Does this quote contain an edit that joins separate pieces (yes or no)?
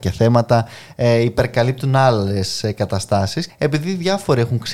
yes